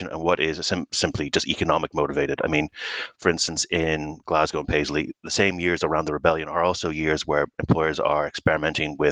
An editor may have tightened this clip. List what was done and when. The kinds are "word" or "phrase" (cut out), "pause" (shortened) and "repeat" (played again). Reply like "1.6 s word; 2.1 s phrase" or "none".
none